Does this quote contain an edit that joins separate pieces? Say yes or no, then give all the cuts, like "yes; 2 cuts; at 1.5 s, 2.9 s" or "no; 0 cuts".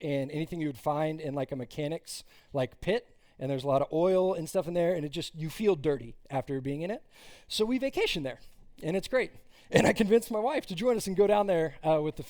no; 0 cuts